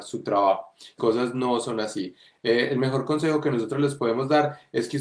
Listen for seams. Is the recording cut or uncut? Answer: cut